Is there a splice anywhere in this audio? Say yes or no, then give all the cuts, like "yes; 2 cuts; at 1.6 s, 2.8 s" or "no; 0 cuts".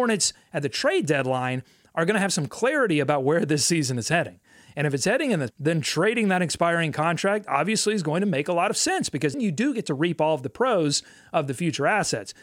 yes; 2 cuts; at 5.5 s, 9.3 s